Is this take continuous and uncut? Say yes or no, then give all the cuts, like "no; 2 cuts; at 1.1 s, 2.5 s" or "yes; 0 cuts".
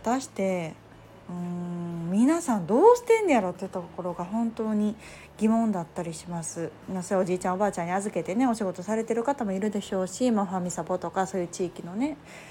no; 1 cut; at 1.2 s